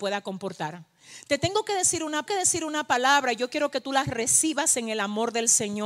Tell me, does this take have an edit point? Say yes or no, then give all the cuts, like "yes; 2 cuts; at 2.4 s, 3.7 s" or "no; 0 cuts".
yes; 1 cut; at 2.3 s